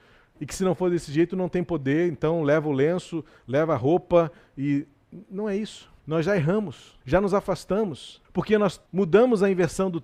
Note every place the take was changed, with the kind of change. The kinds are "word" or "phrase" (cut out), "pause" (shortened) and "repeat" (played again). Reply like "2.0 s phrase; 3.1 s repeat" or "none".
6.0 s pause; 7.0 s pause; 8.2 s pause; 8.9 s pause

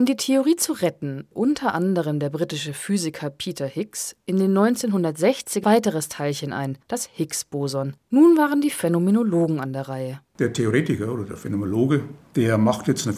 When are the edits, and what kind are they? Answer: 1.3 s word; 5.6 s phrase; 6.8 s pause; 8.0 s pause; 10.2 s pause

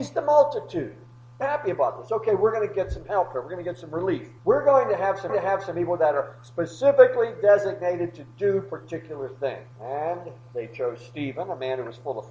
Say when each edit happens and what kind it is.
1.4 s word; 4.4 s pause; 5.3 s repeat; 9.7 s pause

